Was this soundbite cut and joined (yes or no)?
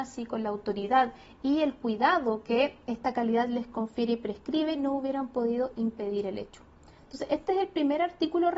no